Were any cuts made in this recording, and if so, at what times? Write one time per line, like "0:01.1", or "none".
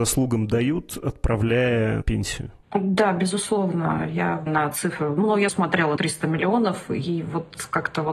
0:02.0
0:02.6
0:04.5
0:05.5
0:06.0